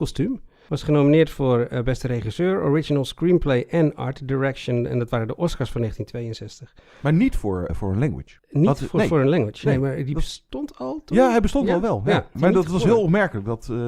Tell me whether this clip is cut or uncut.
cut